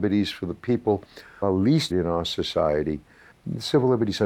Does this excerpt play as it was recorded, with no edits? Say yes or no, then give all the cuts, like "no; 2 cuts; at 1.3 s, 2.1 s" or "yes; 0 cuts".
no; 2 cuts; at 1.4 s, 1.9 s